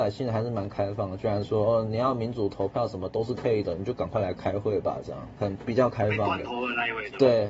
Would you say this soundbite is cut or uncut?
cut